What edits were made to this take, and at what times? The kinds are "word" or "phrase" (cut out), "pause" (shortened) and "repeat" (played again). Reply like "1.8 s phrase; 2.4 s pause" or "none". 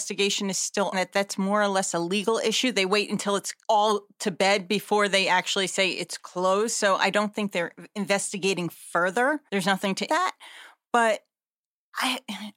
0.9 s phrase; 3.6 s pause; 9.5 s pause; 10.1 s word